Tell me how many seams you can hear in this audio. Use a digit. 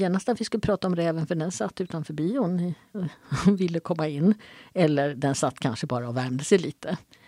0